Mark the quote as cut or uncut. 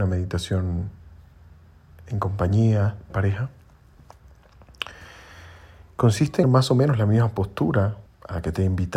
cut